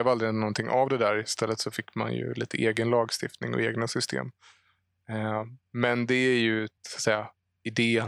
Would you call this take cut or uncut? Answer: cut